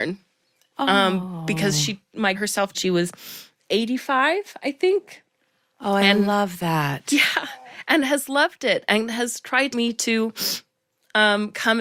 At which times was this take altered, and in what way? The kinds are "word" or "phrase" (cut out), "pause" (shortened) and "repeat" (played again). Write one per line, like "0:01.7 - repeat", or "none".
0:02.3 - phrase
0:02.7 - phrase
0:09.7 - phrase

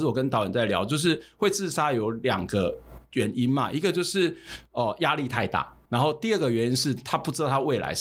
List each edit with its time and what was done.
0:05.9 - word

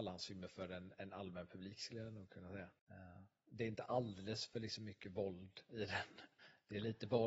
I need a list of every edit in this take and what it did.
0:02.8 - pause

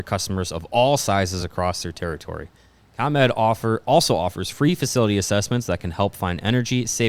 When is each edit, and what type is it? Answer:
none

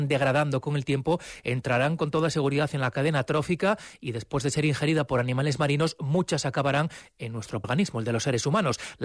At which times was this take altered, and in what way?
0:07.6 - word

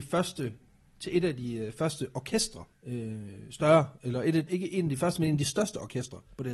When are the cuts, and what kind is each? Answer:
0:02.7 - pause
0:04.5 - word

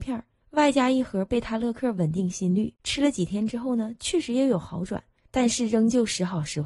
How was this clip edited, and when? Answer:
0:02.8 - pause

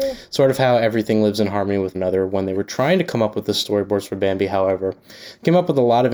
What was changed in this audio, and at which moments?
0:01.9 - word

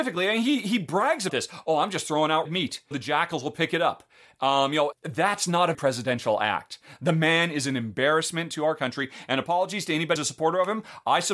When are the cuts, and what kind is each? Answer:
0:01.3 - word
0:02.4 - word
0:02.9 - word
0:04.9 - word
0:05.7 - word
0:10.2 - word

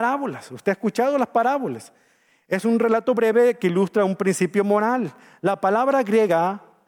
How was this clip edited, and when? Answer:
none

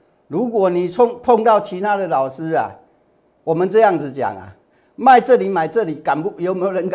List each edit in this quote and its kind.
none

